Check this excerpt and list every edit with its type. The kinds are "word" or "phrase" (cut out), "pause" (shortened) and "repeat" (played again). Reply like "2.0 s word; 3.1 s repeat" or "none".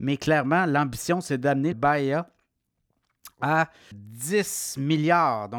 1.7 s word; 3.9 s word